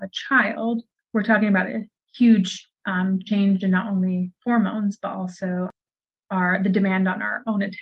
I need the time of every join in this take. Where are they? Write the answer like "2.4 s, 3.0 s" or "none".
none

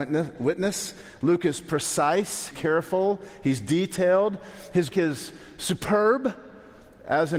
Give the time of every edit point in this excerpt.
2.5 s, 4.9 s

